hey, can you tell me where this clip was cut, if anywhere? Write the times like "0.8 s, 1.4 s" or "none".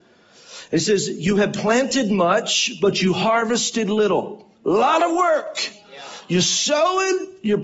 4.5 s